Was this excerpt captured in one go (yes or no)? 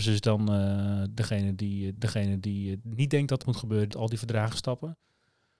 no